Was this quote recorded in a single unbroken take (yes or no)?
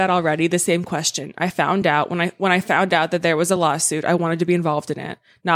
yes